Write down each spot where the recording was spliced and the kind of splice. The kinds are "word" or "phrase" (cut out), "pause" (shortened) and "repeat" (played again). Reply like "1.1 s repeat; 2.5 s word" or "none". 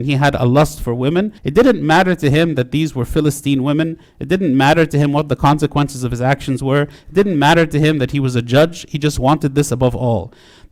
1.4 s pause